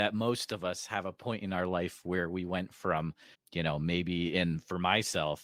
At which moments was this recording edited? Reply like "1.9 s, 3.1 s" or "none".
3.3 s